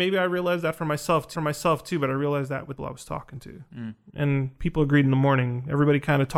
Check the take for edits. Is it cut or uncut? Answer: cut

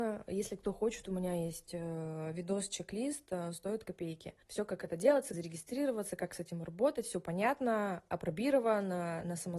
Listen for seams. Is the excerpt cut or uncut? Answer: cut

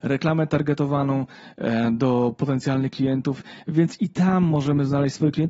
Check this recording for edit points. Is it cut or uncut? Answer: uncut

